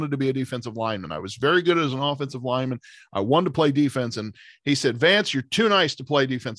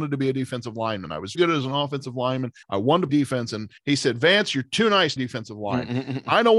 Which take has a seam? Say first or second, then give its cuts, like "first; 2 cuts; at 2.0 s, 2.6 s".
second; 5 cuts; at 1.3 s, 2.6 s, 3.1 s, 3.8 s, 5.2 s